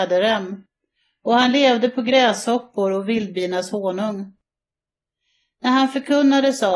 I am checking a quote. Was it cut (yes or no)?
no